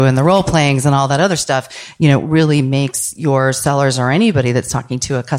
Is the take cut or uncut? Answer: uncut